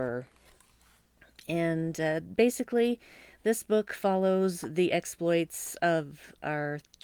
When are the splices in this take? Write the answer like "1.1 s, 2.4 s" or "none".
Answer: none